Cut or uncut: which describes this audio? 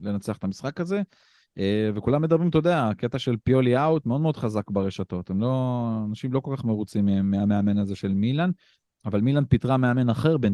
uncut